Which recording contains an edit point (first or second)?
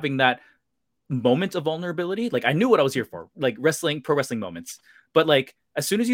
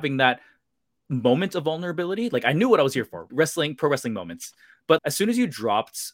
second